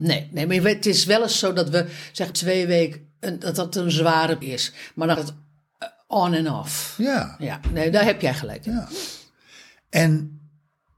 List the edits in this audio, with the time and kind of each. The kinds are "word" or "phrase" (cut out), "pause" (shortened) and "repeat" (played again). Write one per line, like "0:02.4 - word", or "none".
0:02.3 - word
0:04.4 - word
0:05.2 - word